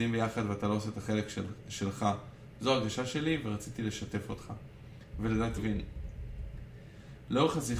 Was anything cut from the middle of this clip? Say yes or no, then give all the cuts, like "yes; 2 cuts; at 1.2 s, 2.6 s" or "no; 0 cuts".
yes; 1 cut; at 5.6 s